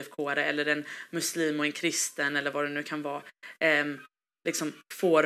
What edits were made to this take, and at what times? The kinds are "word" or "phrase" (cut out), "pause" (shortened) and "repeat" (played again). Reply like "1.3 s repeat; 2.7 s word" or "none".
none